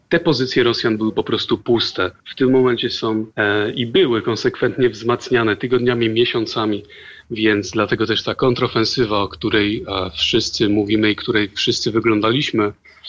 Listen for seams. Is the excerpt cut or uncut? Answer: cut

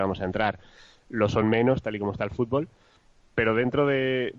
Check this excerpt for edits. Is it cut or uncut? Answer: uncut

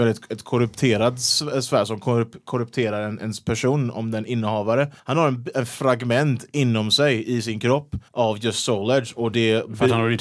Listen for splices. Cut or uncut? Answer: cut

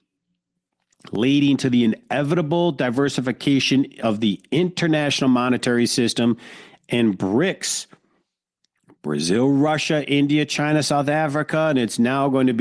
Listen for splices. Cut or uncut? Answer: uncut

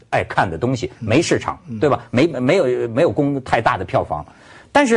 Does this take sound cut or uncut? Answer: uncut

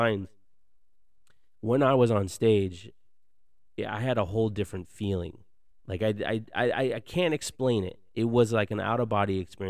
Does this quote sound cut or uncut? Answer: uncut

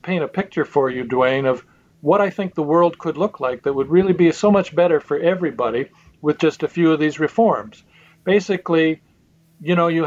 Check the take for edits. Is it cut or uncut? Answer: uncut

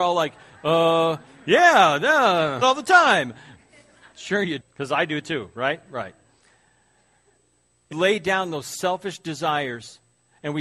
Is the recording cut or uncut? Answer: cut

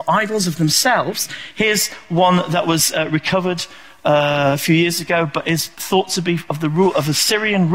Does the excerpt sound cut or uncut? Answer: uncut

